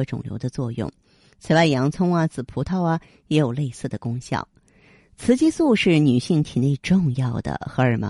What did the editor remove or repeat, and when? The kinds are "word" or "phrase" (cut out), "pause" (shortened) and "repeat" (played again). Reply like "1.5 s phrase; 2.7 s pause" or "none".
none